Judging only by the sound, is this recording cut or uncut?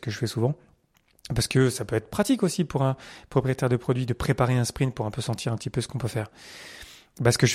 uncut